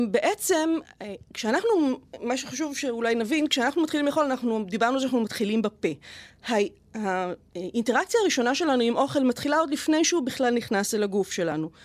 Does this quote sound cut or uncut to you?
uncut